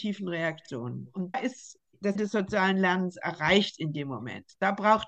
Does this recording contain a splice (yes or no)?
yes